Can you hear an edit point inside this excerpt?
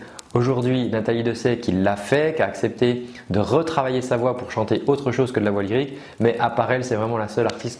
no; 0 cuts

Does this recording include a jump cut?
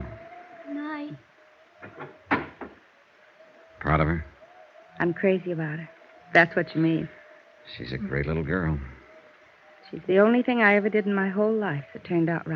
no; 0 cuts

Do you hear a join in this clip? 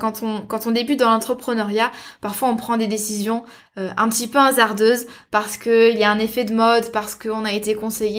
no; 0 cuts

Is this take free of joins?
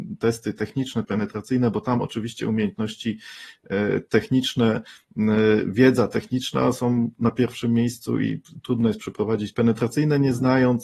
no; 2 cuts; at 1.0 s, 9.5 s

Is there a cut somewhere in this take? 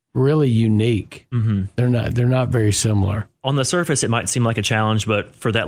no; 0 cuts

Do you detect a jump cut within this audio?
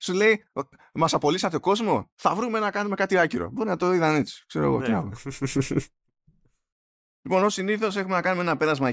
no; 0 cuts

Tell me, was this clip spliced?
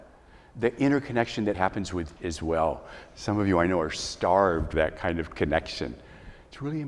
yes; 3 cuts; at 1.5 s, 2.2 s, 4.7 s

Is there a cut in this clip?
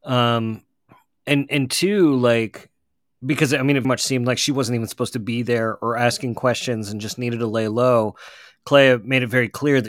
yes; 1 cut; at 3.8 s

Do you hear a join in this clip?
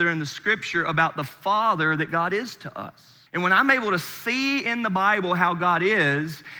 yes; 1 cut; at 3.3 s

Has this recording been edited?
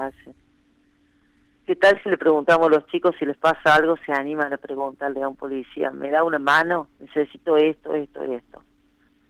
yes; 1 cut; at 6.9 s

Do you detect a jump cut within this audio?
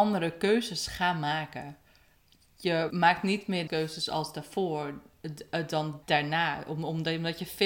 yes; 3 cuts; at 2.9 s, 3.7 s, 6.0 s

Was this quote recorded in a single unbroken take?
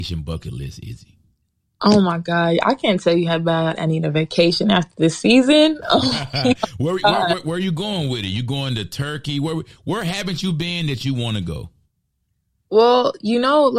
yes; 0 cuts

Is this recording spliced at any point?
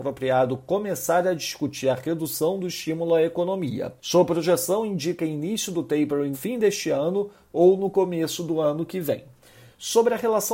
yes; 2 cuts; at 4.0 s, 6.3 s

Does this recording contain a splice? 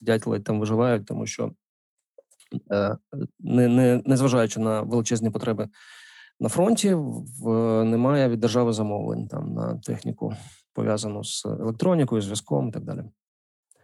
no; 0 cuts

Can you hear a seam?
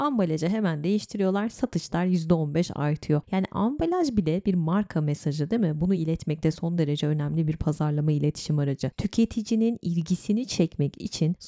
no; 0 cuts

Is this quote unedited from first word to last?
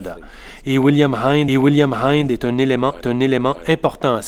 no; 2 cuts; at 1.5 s, 3.0 s

